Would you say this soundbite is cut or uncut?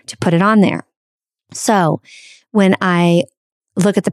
uncut